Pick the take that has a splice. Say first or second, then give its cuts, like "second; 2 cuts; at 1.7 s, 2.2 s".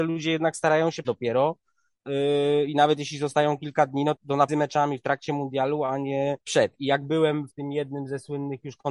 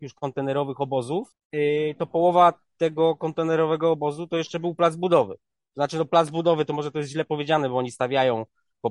first; 5 cuts; at 1.0 s, 4.2 s, 4.5 s, 6.4 s, 7.5 s